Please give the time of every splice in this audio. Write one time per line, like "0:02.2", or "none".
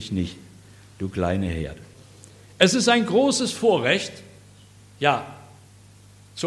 none

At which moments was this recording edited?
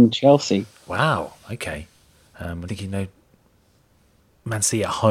0:02.7

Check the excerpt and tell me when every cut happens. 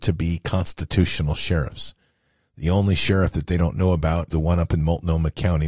0:04.3

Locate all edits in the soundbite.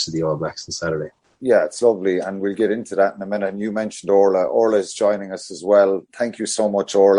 none

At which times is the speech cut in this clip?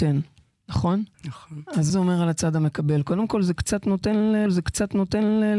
0:01.1
0:01.9
0:04.5

